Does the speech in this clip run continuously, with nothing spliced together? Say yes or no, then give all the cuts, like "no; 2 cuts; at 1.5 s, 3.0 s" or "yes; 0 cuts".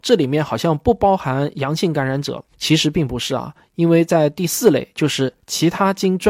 no; 1 cut; at 2.5 s